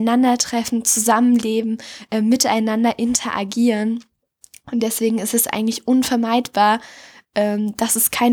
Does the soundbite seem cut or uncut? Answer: uncut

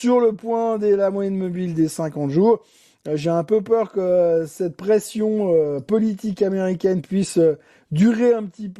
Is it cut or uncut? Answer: uncut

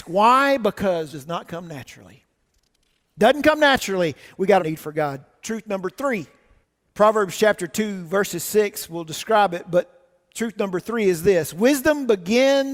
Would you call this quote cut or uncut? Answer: cut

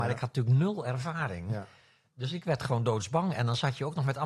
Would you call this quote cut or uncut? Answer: uncut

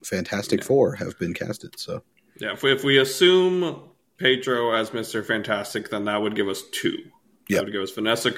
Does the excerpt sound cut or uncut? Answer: uncut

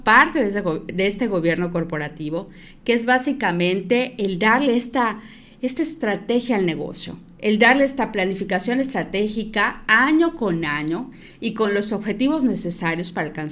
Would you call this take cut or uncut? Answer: uncut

